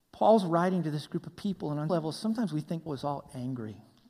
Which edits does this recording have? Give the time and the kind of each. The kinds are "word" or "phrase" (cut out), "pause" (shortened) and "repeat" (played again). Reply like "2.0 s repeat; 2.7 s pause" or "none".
1.9 s word; 2.9 s word